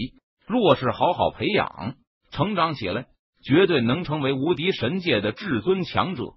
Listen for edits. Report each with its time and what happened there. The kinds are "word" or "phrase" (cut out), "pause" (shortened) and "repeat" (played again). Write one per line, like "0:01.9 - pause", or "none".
none